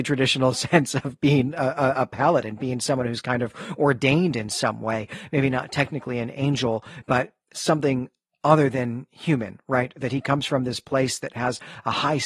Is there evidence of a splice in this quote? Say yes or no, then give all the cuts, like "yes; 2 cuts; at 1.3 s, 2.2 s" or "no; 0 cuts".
no; 0 cuts